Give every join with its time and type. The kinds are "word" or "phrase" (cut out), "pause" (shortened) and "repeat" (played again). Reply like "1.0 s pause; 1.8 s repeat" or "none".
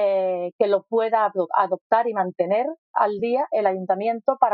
none

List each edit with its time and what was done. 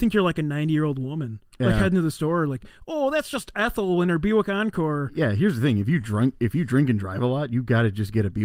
1.5 s pause

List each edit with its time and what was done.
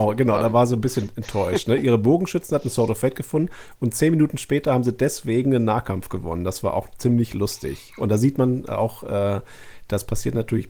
none

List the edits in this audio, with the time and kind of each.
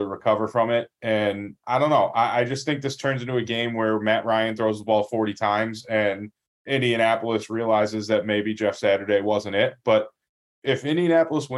none

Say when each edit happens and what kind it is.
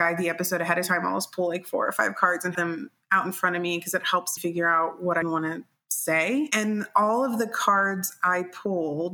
2.5 s word; 4.4 s word; 5.2 s word

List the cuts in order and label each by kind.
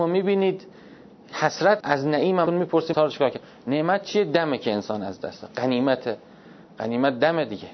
1.8 s word; 2.5 s word; 2.9 s word

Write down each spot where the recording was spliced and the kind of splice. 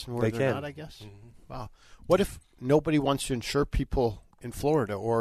4.3 s pause

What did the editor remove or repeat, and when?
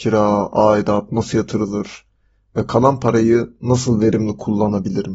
none

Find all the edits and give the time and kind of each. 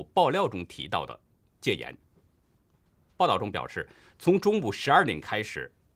none

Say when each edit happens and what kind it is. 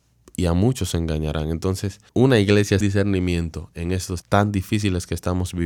2.1 s pause; 2.8 s word; 4.2 s word

